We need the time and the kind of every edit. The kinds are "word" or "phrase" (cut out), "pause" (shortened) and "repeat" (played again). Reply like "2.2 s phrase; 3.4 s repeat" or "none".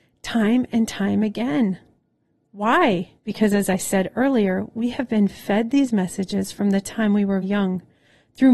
3.2 s pause; 7.4 s word